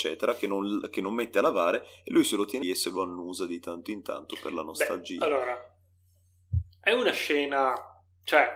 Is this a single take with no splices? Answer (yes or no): no